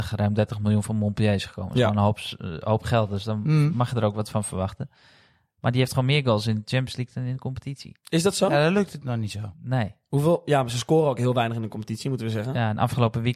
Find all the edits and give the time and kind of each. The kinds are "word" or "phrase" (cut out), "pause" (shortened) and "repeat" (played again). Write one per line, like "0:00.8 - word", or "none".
none